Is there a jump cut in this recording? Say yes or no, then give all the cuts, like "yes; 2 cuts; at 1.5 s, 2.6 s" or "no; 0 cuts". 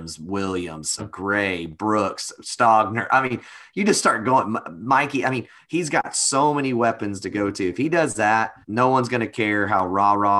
yes; 2 cuts; at 1.0 s, 8.6 s